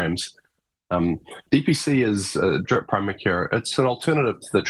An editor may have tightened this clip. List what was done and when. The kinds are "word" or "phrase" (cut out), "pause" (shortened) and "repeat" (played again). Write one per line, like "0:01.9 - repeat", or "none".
0:01.5 - pause
0:02.6 - word